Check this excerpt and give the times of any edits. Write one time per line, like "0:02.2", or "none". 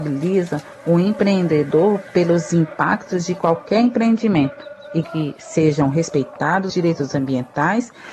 0:05.0
0:06.7